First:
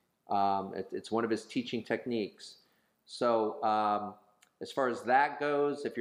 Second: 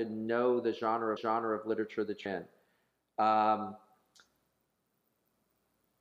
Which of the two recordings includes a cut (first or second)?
second